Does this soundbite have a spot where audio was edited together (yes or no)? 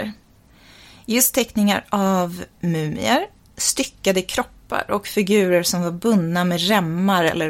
no